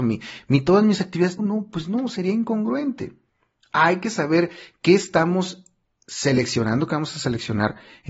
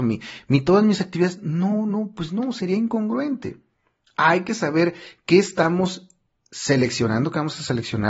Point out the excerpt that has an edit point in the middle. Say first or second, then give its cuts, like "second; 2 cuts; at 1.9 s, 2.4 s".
first; 1 cut; at 1.4 s